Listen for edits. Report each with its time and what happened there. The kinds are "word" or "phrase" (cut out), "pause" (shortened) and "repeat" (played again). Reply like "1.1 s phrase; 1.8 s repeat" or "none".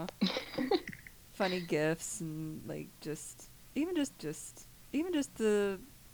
4.1 s repeat